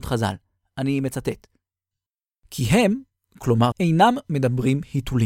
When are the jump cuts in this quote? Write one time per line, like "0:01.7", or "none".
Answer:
0:03.7